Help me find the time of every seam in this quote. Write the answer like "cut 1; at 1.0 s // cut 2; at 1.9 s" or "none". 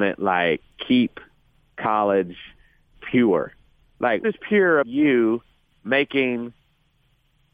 cut 1; at 3.0 s // cut 2; at 4.2 s // cut 3; at 4.8 s